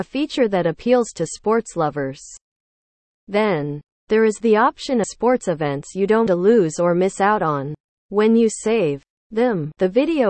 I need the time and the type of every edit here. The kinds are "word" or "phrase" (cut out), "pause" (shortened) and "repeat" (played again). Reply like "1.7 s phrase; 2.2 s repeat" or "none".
5.0 s phrase; 6.3 s word; 7.9 s pause